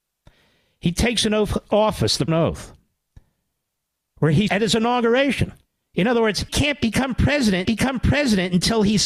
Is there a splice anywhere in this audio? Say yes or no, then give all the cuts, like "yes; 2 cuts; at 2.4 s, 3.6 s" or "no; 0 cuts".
yes; 5 cuts; at 2.3 s, 4.5 s, 5.7 s, 6.5 s, 7.6 s